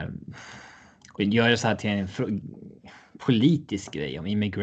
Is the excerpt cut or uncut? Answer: uncut